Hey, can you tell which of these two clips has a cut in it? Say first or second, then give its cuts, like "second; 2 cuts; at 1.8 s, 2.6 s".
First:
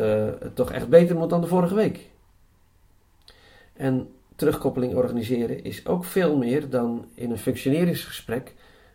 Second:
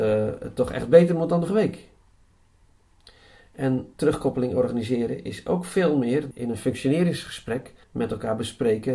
second; 4 cuts; at 1.5 s, 3.9 s, 6.3 s, 7.8 s